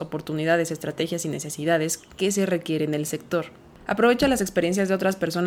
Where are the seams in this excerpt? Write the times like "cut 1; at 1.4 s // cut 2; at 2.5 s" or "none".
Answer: none